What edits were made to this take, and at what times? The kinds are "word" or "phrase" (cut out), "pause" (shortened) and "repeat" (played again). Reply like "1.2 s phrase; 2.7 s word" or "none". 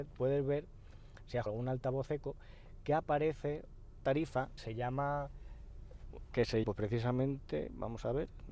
1.5 s word; 4.0 s word; 4.6 s word; 6.6 s word

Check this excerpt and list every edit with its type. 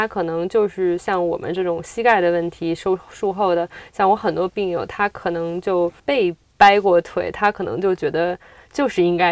6.0 s pause

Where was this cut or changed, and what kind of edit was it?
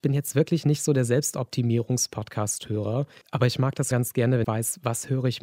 3.2 s pause; 3.9 s word; 4.4 s word

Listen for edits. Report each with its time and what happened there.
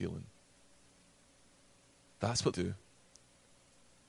2.5 s phrase

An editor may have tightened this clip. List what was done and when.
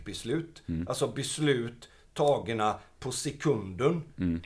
none

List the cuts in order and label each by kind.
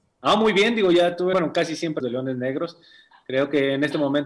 1.3 s phrase; 2.0 s phrase

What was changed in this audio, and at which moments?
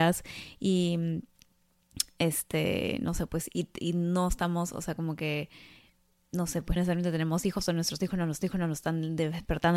6.8 s word; 8.4 s repeat

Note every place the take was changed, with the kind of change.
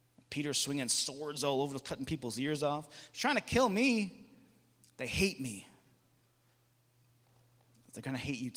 none

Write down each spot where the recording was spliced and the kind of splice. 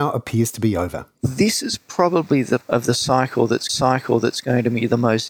1.1 s pause; 2.6 s word; 3.7 s repeat

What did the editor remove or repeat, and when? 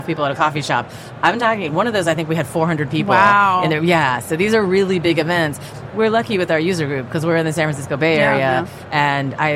none

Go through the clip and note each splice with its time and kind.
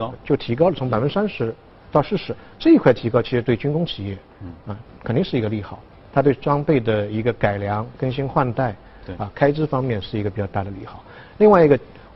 none

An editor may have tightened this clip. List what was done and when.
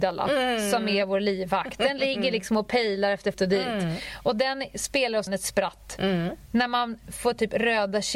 3.3 s phrase; 5.3 s word

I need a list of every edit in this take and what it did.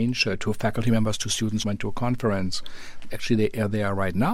1.6 s word

